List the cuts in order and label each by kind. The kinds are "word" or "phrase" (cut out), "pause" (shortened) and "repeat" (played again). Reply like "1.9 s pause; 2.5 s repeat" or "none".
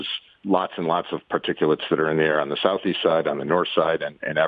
none